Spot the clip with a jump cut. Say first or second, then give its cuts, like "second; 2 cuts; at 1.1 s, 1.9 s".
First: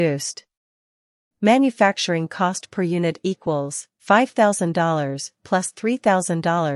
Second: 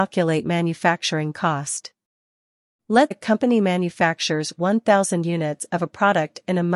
second; 1 cut; at 3.1 s